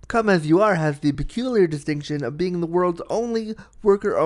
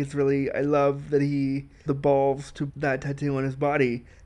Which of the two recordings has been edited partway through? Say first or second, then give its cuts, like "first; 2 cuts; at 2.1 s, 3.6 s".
second; 2 cuts; at 1.9 s, 2.7 s